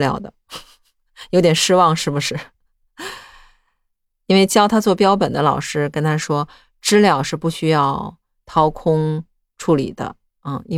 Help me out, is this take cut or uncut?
uncut